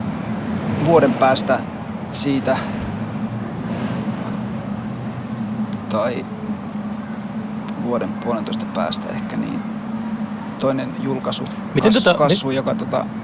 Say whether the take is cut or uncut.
uncut